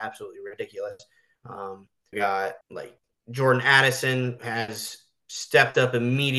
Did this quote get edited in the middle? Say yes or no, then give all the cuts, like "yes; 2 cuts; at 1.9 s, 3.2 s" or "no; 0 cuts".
yes; 3 cuts; at 2.1 s, 2.6 s, 4.4 s